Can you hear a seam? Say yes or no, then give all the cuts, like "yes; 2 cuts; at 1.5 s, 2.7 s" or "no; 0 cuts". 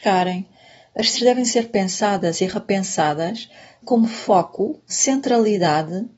yes; 3 cuts; at 1.1 s, 3.8 s, 4.9 s